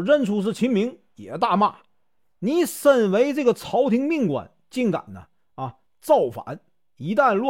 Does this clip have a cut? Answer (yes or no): no